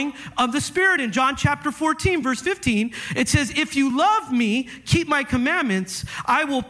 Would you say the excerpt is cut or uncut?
uncut